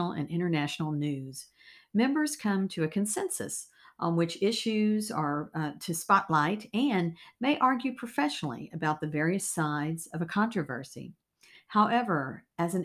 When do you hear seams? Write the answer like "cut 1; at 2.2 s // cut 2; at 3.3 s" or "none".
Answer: none